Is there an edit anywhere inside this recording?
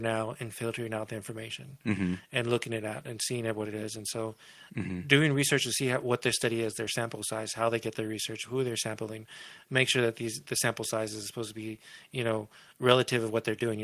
no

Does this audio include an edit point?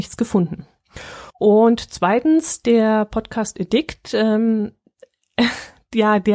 yes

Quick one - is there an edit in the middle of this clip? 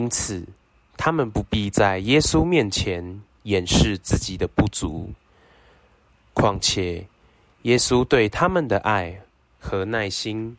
no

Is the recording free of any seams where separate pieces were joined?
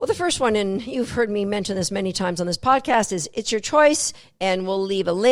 yes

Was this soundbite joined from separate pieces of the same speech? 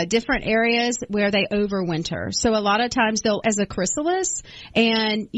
yes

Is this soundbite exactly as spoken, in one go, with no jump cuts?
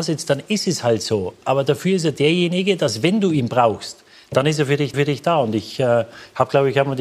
no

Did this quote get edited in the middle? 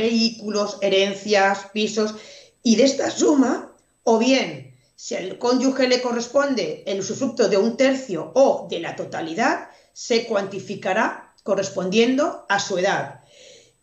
no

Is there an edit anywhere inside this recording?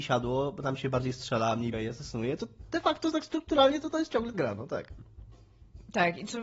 yes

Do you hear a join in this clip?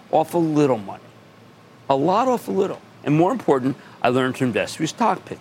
no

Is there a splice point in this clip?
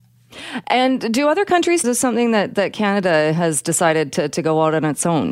yes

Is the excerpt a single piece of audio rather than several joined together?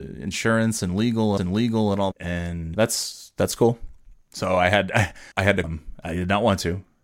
no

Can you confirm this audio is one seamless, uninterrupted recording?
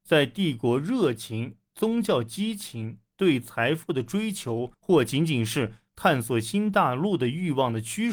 no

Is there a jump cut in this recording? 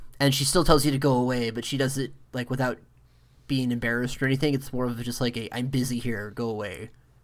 no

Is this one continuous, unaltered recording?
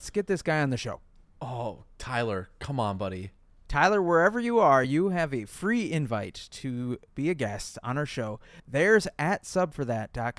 yes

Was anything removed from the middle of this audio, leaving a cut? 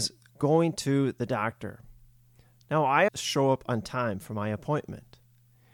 yes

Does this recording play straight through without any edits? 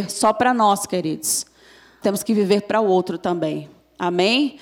no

